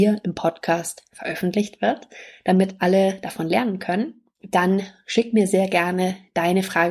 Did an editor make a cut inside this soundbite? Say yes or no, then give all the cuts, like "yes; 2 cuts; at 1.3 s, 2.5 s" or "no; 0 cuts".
no; 0 cuts